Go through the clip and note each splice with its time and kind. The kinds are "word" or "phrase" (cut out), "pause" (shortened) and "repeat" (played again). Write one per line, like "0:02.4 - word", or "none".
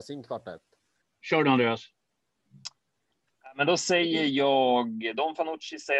0:01.0 - pause